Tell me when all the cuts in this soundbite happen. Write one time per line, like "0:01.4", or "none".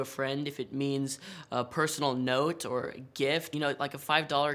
0:03.5